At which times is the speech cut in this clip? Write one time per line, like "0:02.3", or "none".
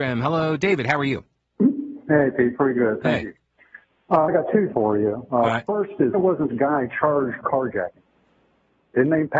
0:04.3
0:04.7
0:06.1
0:06.5
0:07.4